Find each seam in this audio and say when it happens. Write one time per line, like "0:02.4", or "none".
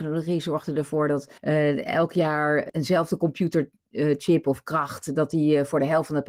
0:01.4